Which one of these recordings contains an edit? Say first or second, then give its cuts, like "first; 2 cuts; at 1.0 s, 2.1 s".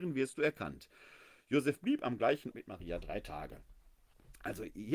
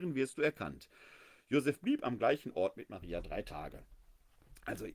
first; 1 cut; at 2.5 s